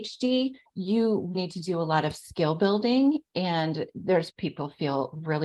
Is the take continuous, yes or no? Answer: no